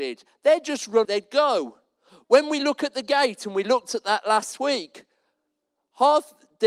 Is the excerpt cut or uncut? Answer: cut